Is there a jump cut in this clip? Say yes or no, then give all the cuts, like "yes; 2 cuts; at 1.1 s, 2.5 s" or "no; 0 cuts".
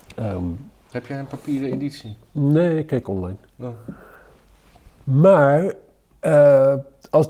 no; 0 cuts